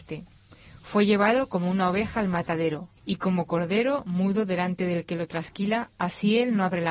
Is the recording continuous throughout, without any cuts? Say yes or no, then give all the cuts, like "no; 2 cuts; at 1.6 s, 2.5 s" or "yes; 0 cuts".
no; 1 cut; at 3.0 s